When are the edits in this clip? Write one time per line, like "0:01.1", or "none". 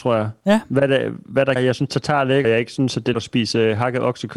0:01.6
0:02.4
0:03.1